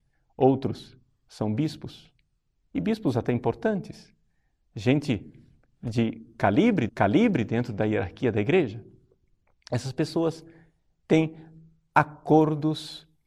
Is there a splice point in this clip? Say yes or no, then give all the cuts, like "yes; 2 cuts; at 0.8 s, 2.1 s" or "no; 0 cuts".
yes; 1 cut; at 6.9 s